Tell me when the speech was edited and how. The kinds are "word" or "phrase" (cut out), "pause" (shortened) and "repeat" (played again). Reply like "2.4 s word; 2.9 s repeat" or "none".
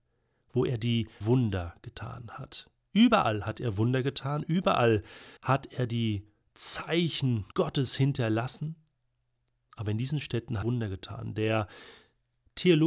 1.2 s word; 5.4 s pause; 7.5 s pause; 10.6 s phrase